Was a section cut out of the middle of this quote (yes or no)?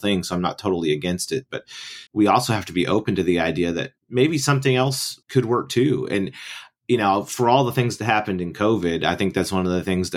yes